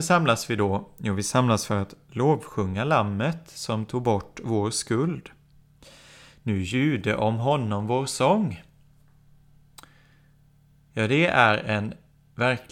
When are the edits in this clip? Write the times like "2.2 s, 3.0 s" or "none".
none